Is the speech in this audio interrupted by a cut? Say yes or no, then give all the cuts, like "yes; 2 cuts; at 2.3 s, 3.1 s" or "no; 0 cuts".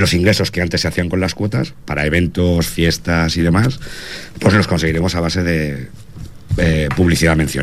no; 0 cuts